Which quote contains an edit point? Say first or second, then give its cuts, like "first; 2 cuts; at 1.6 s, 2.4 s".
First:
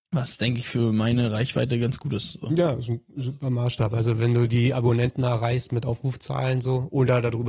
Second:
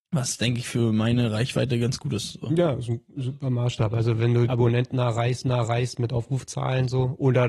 second; 2 cuts; at 4.5 s, 5.4 s